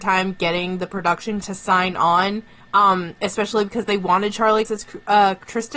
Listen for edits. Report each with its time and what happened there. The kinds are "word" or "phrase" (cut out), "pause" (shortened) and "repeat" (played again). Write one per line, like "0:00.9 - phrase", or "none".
0:01.4 - word
0:02.6 - pause
0:04.6 - word